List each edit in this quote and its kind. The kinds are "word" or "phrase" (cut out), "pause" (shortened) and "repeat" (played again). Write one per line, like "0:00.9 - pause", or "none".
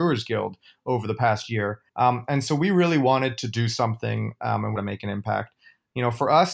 0:01.9 - pause
0:04.8 - phrase